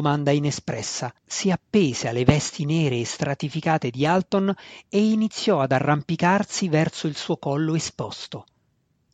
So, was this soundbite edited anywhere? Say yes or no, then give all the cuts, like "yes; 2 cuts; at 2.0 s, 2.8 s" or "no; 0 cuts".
yes; 1 cut; at 1.2 s